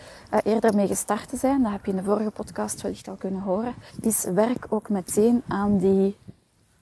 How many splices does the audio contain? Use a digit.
1